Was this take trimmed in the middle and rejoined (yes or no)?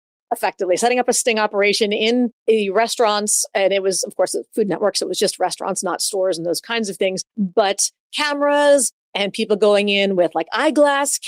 yes